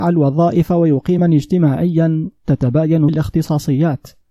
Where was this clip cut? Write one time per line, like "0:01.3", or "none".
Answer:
0:01.2
0:03.1